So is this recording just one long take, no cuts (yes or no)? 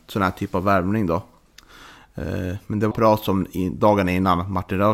no